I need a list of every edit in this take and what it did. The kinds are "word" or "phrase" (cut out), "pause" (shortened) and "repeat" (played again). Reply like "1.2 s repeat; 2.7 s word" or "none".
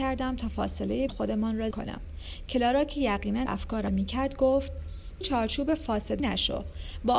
1.1 s word; 1.7 s word; 3.5 s word; 3.9 s word; 5.2 s word; 6.2 s word

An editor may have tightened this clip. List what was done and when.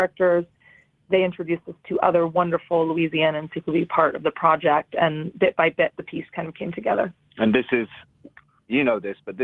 none

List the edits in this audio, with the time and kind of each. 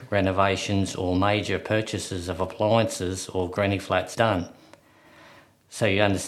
4.1 s word

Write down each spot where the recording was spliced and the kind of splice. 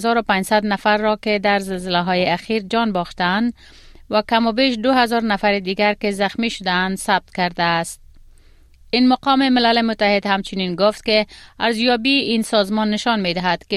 none

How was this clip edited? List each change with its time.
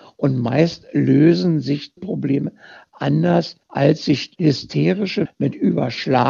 2.0 s word; 3.6 s pause; 5.2 s word

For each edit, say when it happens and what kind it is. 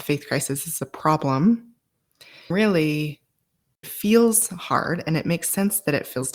2.5 s word; 3.8 s word

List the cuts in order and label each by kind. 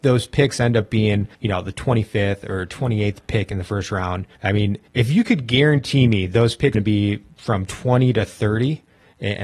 1.3 s pause; 4.3 s pause; 4.9 s pause; 6.7 s phrase

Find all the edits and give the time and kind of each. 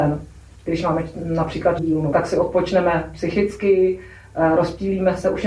1.8 s word; 2.1 s word

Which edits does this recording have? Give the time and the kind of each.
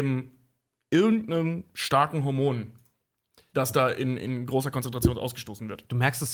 none

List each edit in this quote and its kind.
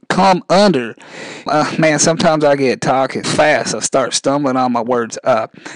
1.5 s word; 3.2 s word

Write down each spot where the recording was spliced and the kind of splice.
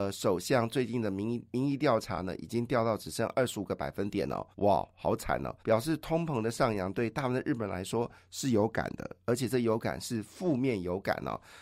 4.5 s pause; 5.6 s pause

